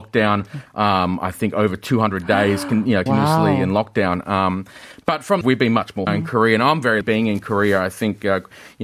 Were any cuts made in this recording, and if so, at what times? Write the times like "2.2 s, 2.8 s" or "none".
3.1 s, 5.4 s, 6.1 s, 7.0 s